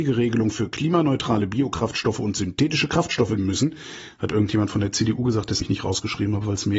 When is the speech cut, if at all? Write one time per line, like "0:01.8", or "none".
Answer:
0:03.4
0:05.6